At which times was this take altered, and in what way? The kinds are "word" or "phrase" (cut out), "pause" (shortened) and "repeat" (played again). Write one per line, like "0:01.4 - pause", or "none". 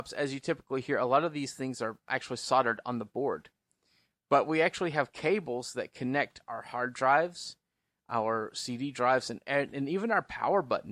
none